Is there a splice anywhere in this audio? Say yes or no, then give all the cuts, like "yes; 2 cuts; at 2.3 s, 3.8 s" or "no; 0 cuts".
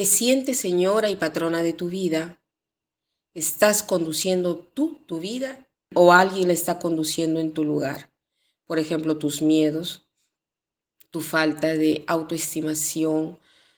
no; 0 cuts